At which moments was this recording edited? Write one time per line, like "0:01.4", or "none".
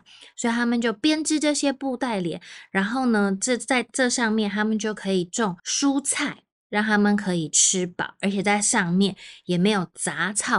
0:05.6